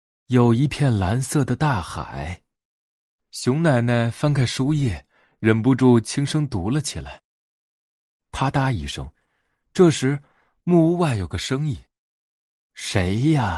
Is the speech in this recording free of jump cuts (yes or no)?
yes